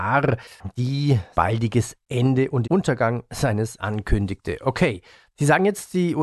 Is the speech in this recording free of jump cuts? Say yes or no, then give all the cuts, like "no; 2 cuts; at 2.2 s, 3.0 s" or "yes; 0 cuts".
no; 3 cuts; at 1.3 s, 2.6 s, 3.8 s